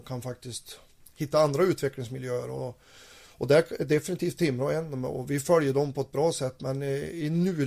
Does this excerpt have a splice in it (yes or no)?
no